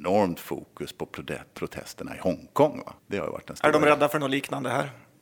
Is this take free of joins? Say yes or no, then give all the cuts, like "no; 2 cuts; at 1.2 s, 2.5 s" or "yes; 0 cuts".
no; 1 cut; at 3.0 s